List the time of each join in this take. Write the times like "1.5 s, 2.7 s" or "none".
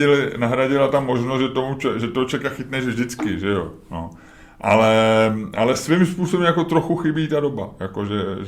none